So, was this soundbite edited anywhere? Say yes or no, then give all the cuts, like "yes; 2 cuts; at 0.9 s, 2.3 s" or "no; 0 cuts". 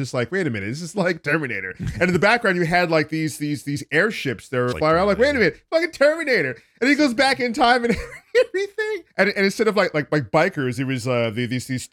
yes; 2 cuts; at 4.7 s, 9.1 s